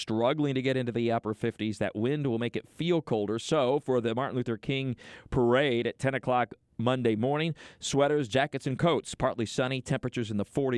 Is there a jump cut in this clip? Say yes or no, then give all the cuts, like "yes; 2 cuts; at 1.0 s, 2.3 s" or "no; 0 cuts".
no; 0 cuts